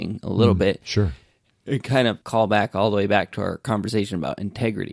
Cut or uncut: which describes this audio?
cut